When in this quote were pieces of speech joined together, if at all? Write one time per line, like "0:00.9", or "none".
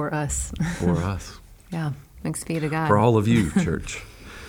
none